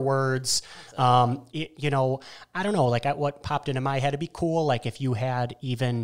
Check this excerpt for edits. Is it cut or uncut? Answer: uncut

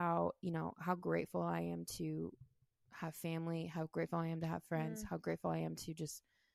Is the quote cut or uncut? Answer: uncut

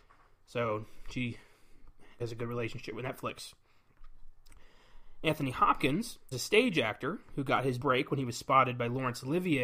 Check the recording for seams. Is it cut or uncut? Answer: cut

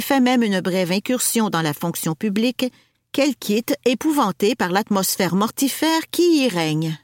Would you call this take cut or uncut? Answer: uncut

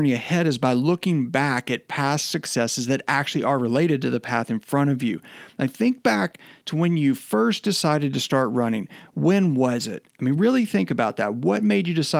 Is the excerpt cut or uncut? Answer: uncut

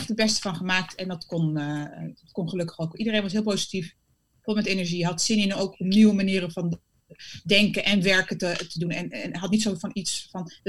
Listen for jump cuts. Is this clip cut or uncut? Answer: uncut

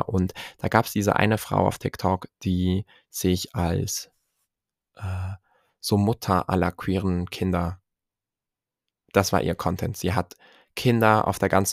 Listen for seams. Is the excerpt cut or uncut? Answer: uncut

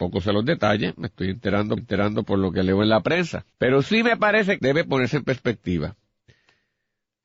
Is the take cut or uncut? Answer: cut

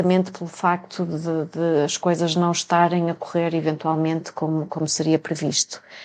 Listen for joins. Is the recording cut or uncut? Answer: uncut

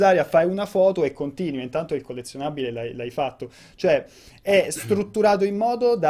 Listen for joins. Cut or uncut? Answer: uncut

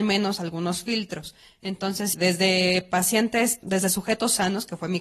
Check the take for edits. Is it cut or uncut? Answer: cut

